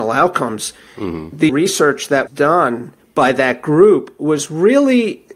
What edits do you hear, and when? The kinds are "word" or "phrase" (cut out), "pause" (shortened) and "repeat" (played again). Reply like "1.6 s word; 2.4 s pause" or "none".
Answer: 1.5 s word; 2.3 s word; 3.0 s pause